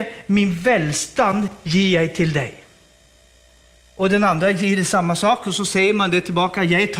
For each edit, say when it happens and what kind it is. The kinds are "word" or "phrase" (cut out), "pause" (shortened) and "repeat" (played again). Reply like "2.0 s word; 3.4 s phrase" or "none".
none